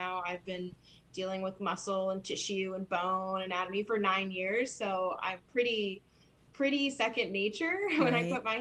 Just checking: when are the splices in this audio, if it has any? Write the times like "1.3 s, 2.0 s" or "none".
none